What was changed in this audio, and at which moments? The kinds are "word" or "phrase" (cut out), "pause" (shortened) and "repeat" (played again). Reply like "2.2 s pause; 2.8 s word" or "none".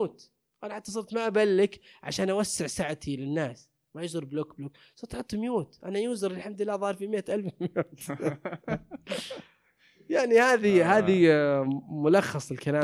none